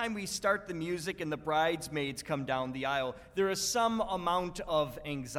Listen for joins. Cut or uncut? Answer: uncut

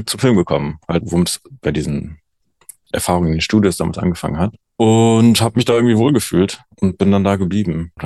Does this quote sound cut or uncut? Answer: cut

